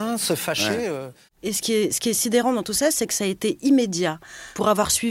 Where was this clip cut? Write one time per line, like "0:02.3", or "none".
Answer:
0:01.3